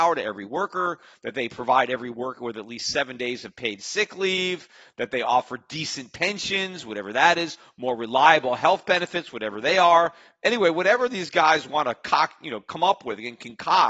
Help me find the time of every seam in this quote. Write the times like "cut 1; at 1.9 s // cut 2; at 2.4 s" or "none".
none